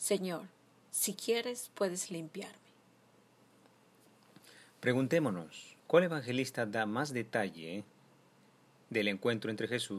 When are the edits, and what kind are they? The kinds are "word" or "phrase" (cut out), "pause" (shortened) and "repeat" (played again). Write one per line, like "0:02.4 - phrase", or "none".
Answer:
0:05.8 - pause